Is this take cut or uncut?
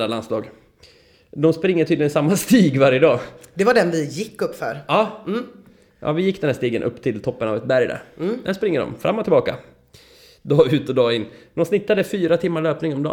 uncut